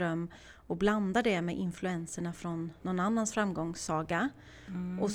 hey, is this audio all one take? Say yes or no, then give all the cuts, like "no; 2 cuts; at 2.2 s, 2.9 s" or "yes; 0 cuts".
no; 1 cut; at 2.8 s